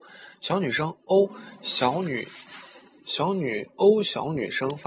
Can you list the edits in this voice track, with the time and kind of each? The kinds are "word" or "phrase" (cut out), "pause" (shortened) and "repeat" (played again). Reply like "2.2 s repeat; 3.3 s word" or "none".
none